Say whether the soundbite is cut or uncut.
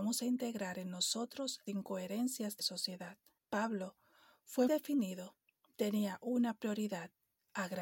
cut